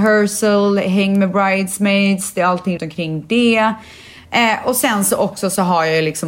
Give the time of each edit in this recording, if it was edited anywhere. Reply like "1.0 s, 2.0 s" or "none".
2.8 s